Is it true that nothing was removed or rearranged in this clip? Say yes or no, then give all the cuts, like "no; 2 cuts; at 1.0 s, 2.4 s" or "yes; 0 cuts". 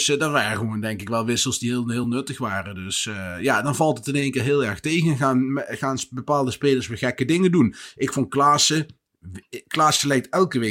yes; 0 cuts